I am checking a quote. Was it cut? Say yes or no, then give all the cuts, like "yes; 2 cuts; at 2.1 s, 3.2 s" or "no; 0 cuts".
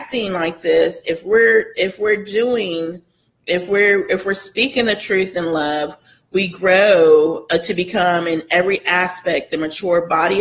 no; 0 cuts